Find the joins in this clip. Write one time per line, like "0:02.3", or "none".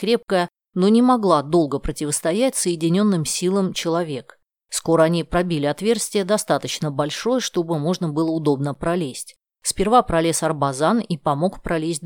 0:03.7